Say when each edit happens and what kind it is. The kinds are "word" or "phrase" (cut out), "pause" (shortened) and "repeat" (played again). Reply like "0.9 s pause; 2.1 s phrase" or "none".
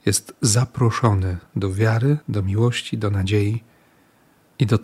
1.5 s pause